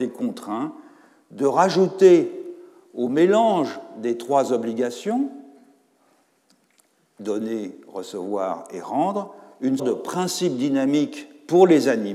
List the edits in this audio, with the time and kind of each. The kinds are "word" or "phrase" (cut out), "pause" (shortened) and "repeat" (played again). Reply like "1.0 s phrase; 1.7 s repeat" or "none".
9.8 s word